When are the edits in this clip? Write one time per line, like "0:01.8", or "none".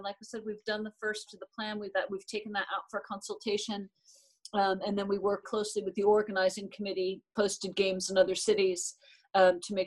0:01.3
0:05.4
0:07.4